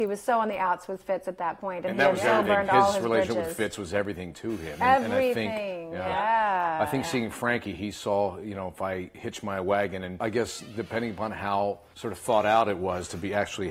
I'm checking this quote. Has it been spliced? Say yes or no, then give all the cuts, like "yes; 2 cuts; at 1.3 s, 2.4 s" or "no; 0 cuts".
no; 0 cuts